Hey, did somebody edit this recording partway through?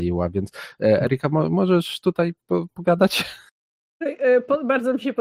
no; 0 cuts

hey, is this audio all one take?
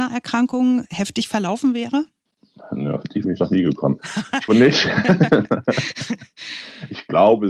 no; 2 cuts; at 3.2 s, 4.5 s

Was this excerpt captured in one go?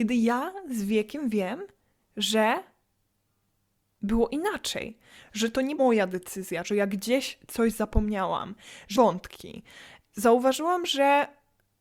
no; 3 cuts; at 5.8 s, 6.6 s, 8.9 s

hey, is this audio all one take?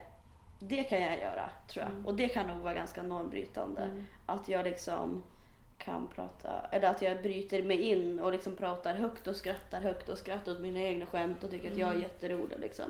yes; 0 cuts

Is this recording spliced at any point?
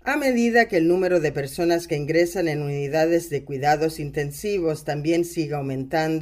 no; 0 cuts

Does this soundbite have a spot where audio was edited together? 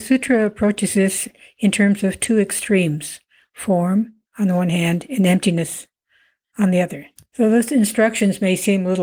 no; 0 cuts

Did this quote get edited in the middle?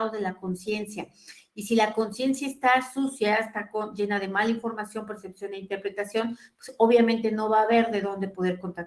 no; 0 cuts

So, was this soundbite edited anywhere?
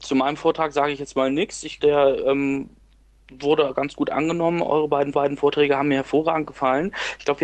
yes; 2 cuts; at 1.8 s, 5.1 s

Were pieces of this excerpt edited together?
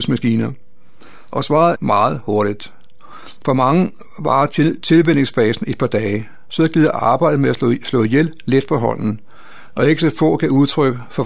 yes; 1 cut; at 1.8 s

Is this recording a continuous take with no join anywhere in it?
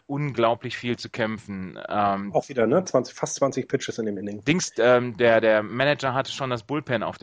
yes; 0 cuts

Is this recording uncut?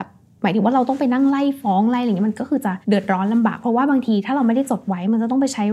no; 1 cut; at 2.8 s

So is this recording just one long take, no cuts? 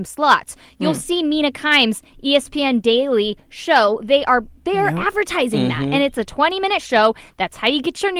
no; 1 cut; at 4.6 s

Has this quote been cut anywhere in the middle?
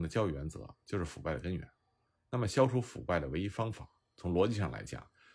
no; 0 cuts

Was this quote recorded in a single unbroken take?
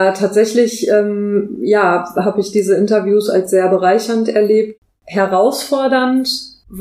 yes; 0 cuts

